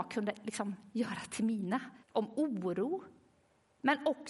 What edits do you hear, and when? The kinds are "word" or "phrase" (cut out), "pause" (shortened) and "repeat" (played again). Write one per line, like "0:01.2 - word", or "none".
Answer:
0:02.0 - pause